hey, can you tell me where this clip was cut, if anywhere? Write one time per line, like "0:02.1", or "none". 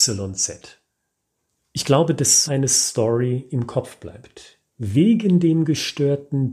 0:02.5
0:04.7